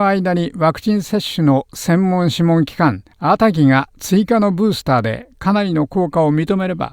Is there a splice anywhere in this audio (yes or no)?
yes